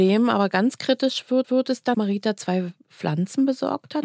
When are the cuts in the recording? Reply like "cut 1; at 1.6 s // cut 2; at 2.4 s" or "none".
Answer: cut 1; at 1.4 s // cut 2; at 1.9 s